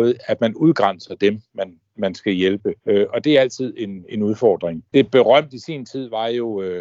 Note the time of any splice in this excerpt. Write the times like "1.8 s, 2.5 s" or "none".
2.8 s, 4.9 s

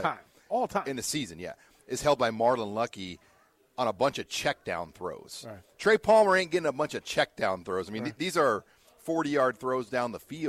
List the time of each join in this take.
none

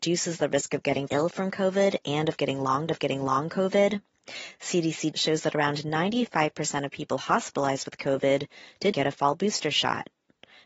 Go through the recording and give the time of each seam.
1.1 s, 2.9 s, 5.1 s, 8.9 s

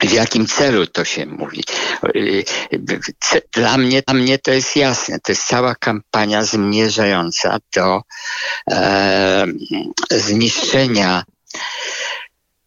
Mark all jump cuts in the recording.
3.5 s, 4.1 s

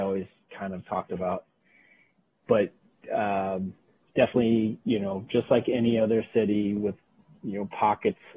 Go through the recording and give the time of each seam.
none

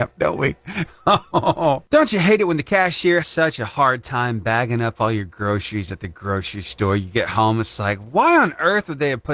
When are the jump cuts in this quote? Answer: 3.2 s

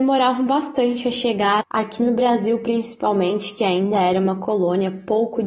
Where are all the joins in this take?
1.6 s

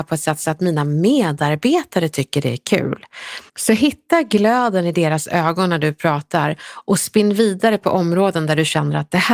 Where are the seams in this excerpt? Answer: 3.5 s

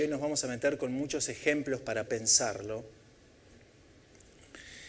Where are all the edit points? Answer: 2.1 s

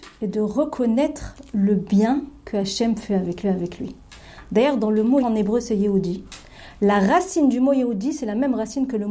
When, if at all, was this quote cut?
3.4 s, 5.2 s

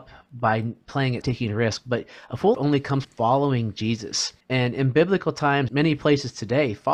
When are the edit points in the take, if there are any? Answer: 1.2 s, 2.5 s, 3.0 s, 4.4 s, 5.7 s

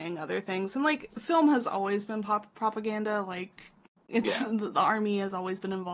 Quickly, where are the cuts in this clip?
3.9 s

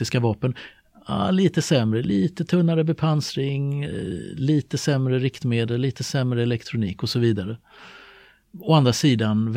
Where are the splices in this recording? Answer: none

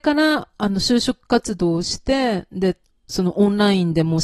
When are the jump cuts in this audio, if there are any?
none

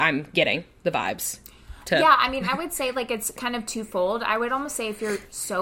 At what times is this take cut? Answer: none

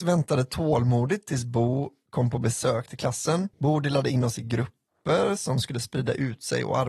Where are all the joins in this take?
3.5 s

